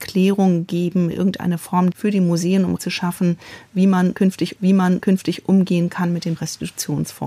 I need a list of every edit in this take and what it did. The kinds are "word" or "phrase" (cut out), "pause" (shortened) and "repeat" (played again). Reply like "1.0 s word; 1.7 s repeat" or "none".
1.9 s phrase; 2.8 s word; 4.6 s repeat; 6.4 s word